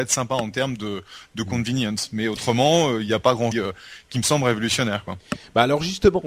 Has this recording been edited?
yes; 1 cut; at 3.5 s

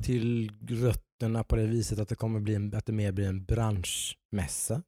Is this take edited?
no; 0 cuts

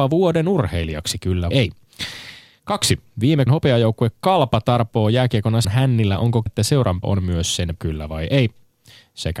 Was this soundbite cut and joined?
yes; 6 cuts; at 1.5 s, 3.5 s, 5.6 s, 6.5 s, 7.0 s, 7.8 s

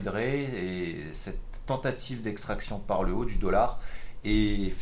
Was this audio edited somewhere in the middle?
no; 0 cuts

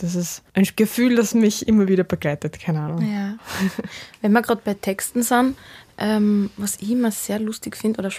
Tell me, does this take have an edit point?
no; 0 cuts

